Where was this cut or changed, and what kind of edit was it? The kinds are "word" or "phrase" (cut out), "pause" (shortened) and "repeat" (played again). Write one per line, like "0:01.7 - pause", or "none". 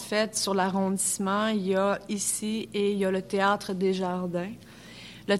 none